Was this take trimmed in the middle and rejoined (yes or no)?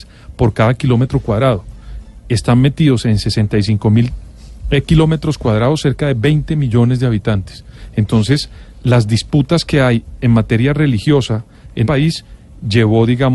yes